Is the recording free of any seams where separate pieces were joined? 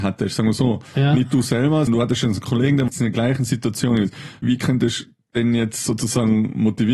no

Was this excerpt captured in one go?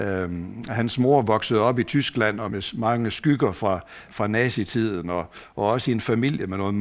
no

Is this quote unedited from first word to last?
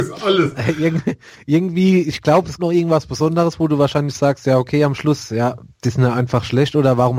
no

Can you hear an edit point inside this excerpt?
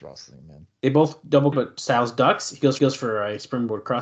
yes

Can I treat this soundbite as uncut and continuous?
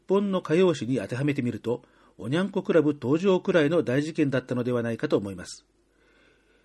yes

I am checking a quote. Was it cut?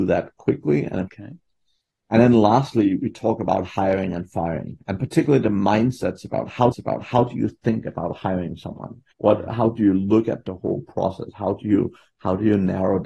yes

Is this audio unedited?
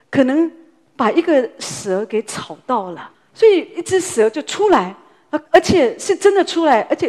no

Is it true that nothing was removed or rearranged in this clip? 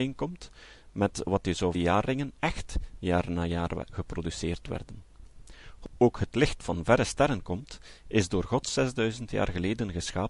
no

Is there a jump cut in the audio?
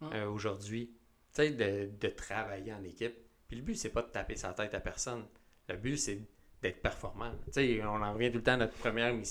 no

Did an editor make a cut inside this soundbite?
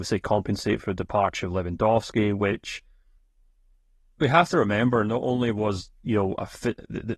no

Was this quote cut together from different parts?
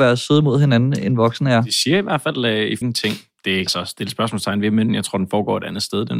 yes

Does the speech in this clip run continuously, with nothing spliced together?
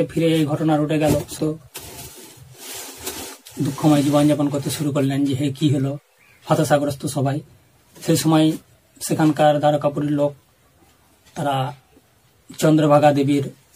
no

